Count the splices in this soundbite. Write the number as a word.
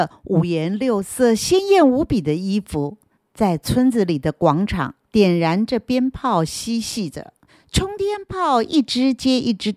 three